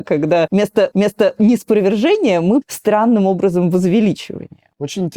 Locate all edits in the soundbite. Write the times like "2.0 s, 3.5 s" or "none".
0.9 s, 2.6 s

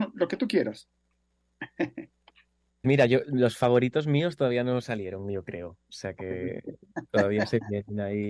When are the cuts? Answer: 2.8 s

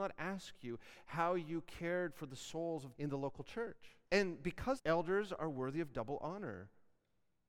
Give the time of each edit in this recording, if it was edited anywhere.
3.0 s, 4.0 s, 4.8 s

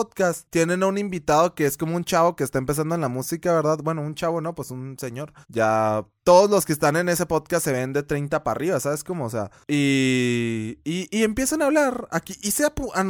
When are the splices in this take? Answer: 5.4 s

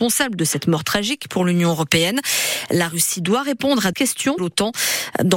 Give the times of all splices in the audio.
3.9 s, 4.4 s

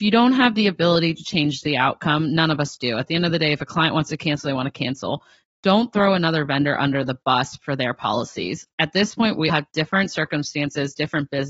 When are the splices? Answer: 9.5 s

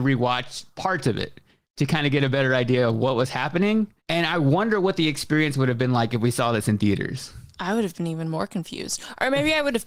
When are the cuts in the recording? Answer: 1.6 s, 4.0 s

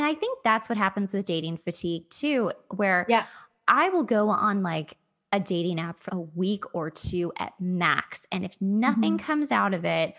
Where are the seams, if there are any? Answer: 6.1 s

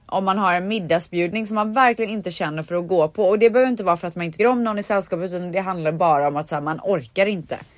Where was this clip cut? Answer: 4.4 s

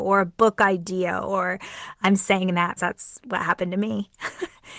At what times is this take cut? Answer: 2.0 s, 2.8 s

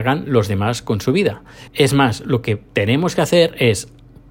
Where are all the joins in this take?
1.7 s

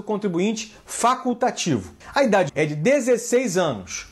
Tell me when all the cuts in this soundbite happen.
2.0 s, 2.5 s

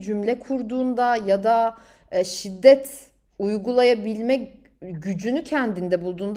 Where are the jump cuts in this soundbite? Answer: none

